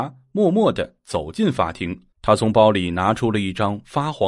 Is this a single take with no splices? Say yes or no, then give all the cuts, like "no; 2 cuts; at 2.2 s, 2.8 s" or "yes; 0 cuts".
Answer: no; 1 cut; at 2.1 s